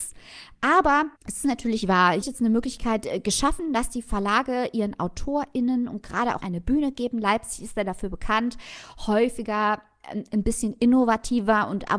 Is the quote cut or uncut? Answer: cut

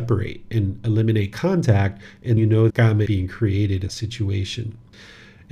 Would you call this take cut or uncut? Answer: cut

